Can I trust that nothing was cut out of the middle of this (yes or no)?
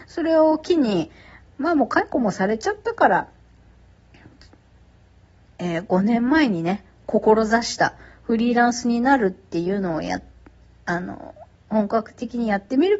yes